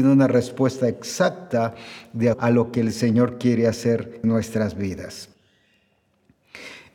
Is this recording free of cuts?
no; 2 cuts; at 2.3 s, 4.2 s

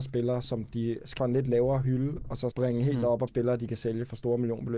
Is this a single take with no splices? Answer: no; 3 cuts; at 1.2 s, 2.5 s, 3.3 s

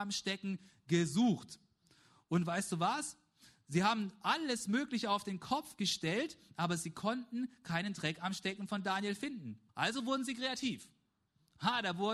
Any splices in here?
yes; 1 cut; at 9.7 s

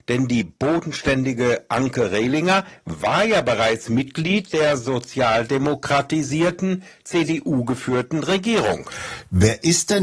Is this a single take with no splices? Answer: yes; 0 cuts

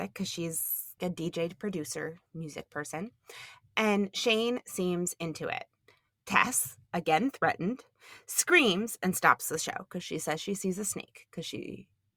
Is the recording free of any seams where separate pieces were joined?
no; 3 cuts; at 1.0 s, 2.3 s, 6.8 s

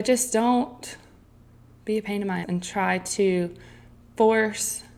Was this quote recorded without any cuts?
no; 1 cut; at 2.4 s

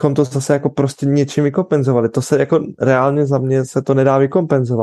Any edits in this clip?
no; 0 cuts

